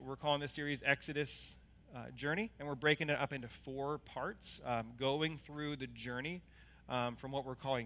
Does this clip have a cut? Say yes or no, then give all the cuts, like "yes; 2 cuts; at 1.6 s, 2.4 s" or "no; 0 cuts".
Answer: no; 0 cuts